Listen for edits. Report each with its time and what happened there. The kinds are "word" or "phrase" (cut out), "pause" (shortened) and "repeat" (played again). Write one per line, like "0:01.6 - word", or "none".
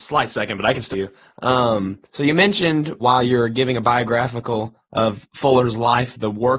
0:00.9 - word
0:03.0 - word